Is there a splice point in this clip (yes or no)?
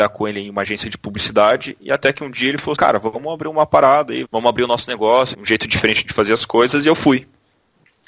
yes